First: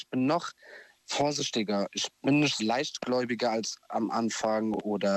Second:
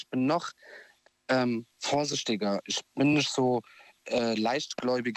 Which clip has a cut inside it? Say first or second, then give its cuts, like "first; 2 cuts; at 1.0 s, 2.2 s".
first; 2 cuts; at 1.0 s, 2.6 s